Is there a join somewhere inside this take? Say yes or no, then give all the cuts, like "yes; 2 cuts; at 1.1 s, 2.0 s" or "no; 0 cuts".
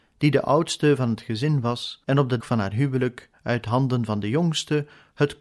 yes; 2 cuts; at 2.0 s, 2.4 s